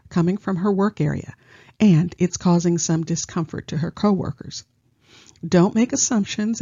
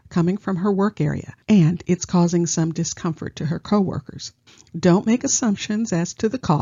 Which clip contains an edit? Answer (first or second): second